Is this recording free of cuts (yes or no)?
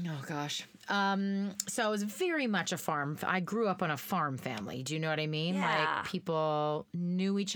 yes